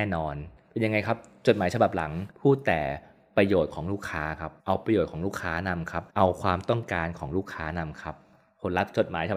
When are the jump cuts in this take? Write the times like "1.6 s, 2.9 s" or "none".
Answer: 2.3 s, 4.6 s, 6.1 s